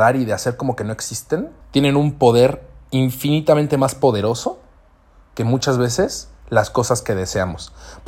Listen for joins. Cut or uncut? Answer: cut